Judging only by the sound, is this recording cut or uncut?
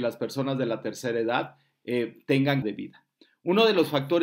cut